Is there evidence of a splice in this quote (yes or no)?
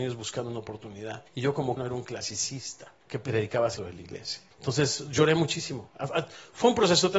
yes